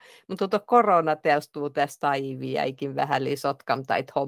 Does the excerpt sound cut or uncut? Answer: uncut